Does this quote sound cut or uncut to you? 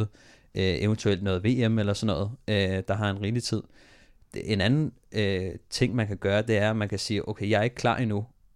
uncut